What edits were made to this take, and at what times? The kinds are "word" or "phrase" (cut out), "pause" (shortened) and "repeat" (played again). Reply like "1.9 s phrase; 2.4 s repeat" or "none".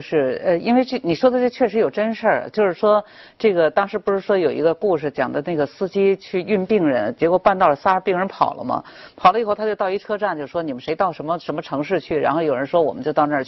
none